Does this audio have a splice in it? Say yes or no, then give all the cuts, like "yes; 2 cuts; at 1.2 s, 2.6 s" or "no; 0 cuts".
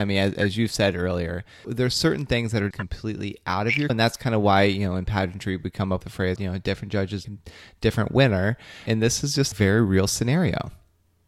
yes; 8 cuts; at 1.6 s, 2.7 s, 3.9 s, 6.0 s, 6.4 s, 7.2 s, 8.9 s, 9.5 s